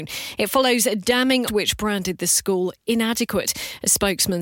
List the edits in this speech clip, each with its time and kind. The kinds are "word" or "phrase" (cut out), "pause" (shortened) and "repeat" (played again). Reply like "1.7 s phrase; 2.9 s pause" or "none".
1.5 s phrase